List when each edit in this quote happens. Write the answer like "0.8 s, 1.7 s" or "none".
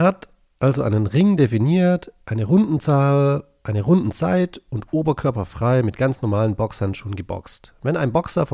none